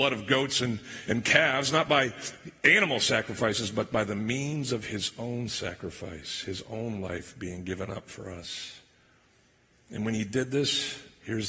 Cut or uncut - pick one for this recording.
uncut